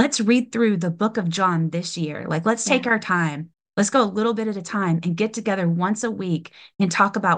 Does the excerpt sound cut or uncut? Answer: uncut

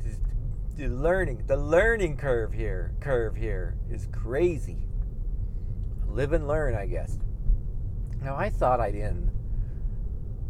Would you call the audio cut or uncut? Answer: cut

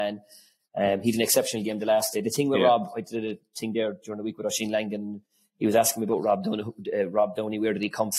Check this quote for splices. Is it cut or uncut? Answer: uncut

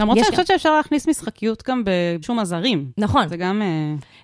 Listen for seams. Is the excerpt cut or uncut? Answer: cut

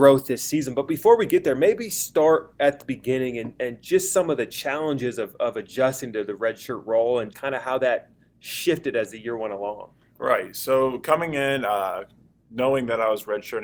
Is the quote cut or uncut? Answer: cut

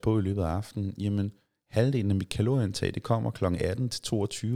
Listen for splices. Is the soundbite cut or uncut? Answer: uncut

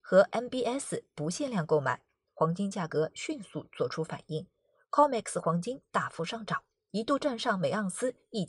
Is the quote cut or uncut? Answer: uncut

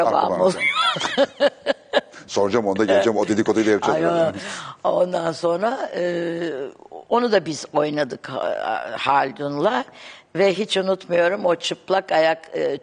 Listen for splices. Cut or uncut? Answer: uncut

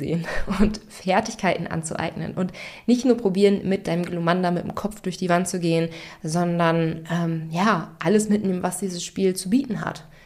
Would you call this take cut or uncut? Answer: uncut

